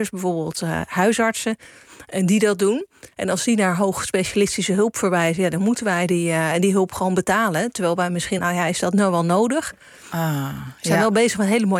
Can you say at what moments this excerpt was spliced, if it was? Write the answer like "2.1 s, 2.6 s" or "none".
3.1 s, 8.4 s